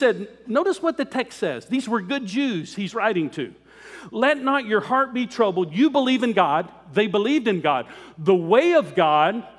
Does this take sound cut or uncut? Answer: uncut